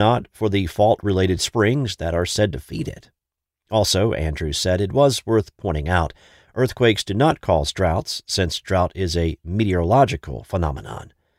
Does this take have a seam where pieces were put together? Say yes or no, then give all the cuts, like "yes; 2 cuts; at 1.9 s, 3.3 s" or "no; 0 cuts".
no; 0 cuts